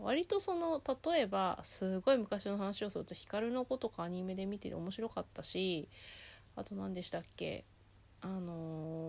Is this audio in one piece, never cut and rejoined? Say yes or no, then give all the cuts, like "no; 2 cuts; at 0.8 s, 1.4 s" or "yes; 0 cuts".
yes; 0 cuts